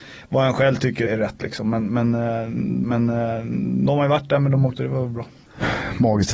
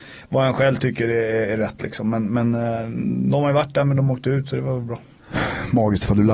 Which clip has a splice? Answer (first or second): first